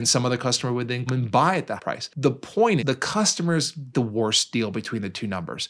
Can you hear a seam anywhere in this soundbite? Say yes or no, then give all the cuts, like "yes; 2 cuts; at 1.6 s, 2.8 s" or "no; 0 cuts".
yes; 4 cuts; at 1.1 s, 1.8 s, 2.8 s, 3.9 s